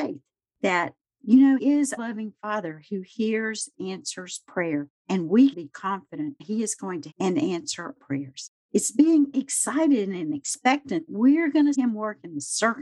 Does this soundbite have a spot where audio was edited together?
yes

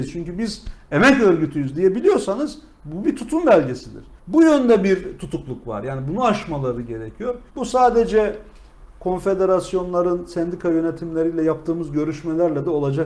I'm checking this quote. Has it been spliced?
yes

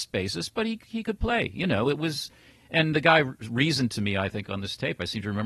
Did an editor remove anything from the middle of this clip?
no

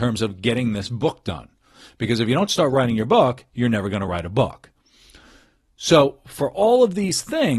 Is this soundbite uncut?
yes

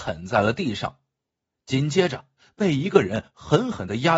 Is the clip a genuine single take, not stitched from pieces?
yes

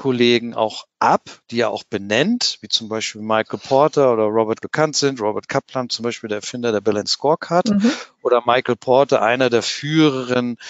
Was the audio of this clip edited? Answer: yes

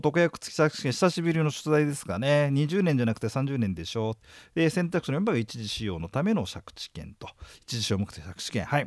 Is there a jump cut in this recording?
no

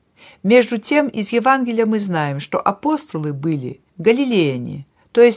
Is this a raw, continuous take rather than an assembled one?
yes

